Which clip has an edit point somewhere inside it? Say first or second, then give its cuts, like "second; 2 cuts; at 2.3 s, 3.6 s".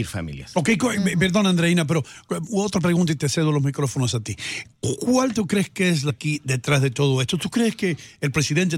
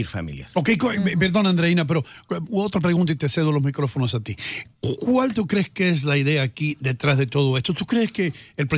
first; 1 cut; at 6.1 s